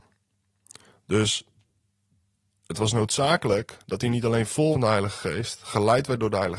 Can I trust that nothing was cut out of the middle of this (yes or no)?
no